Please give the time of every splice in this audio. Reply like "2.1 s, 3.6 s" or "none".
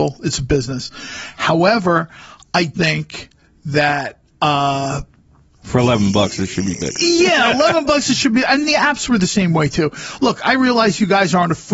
2.7 s, 8.6 s